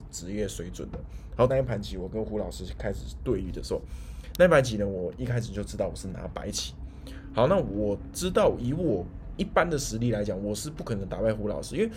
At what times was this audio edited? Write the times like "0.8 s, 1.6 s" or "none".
1.5 s